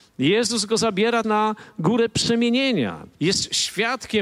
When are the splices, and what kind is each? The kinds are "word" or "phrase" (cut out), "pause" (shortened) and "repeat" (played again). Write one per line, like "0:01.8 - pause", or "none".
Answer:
0:01.2 - word
0:03.1 - pause

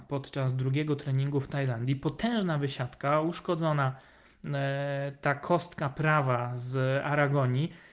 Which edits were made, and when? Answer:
none

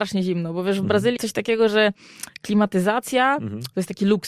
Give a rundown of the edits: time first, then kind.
0:01.2 - word

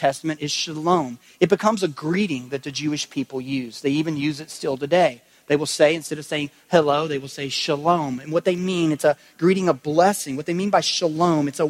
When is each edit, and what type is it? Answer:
none

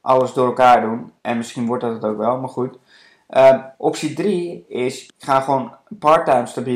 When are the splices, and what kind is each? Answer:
0:01.2 - pause
0:03.7 - pause
0:05.1 - pause

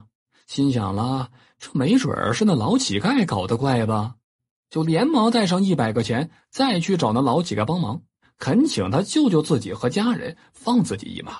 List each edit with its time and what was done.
none

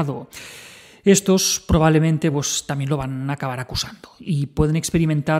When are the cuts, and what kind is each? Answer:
none

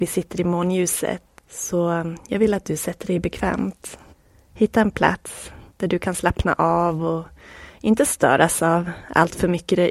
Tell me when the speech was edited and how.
0:04.1 - pause
0:05.7 - pause

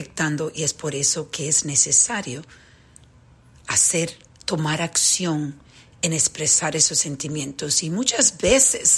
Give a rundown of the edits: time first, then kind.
none

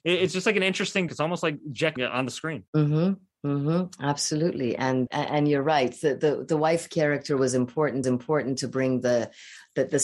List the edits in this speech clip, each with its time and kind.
0:01.1 - word
0:02.0 - phrase
0:02.7 - pause
0:05.1 - word
0:08.0 - repeat

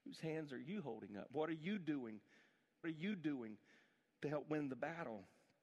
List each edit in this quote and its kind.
0:02.8 - repeat

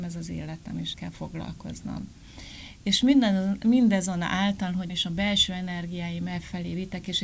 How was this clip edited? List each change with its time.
0:00.9 - word
0:04.9 - phrase

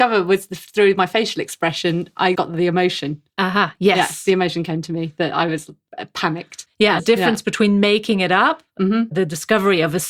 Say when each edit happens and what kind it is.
0:02.3 - word
0:03.3 - pause
0:07.0 - phrase

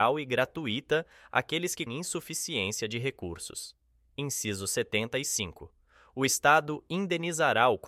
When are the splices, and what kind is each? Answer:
0:01.9 - word

